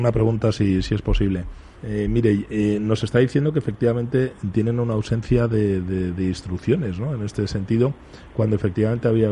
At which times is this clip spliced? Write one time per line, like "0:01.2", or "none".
0:01.8